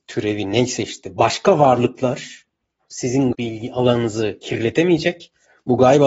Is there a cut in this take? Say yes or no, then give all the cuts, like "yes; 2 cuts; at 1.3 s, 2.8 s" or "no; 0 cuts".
yes; 1 cut; at 3.3 s